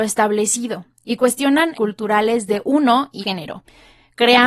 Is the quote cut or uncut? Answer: cut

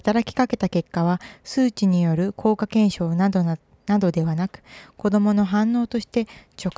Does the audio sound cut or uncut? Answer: uncut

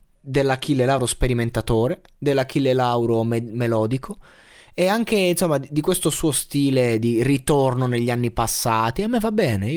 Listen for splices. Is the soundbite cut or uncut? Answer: uncut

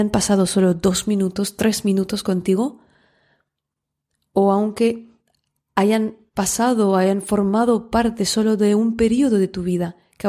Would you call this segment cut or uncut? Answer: uncut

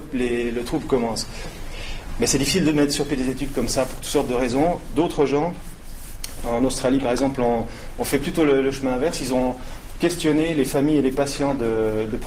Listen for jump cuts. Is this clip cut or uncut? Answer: uncut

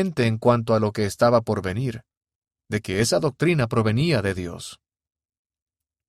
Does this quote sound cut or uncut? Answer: uncut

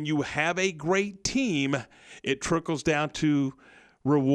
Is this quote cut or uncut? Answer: uncut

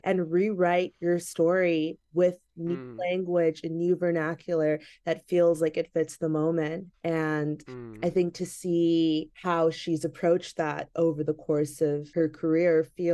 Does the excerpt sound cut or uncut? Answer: uncut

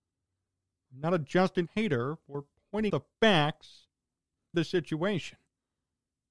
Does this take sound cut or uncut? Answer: cut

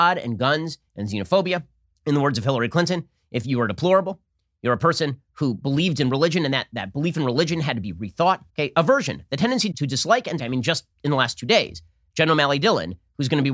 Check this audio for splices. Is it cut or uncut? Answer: cut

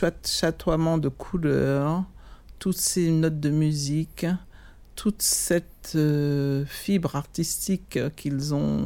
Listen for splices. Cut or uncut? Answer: uncut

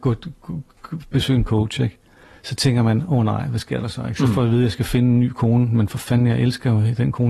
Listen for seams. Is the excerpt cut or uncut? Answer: uncut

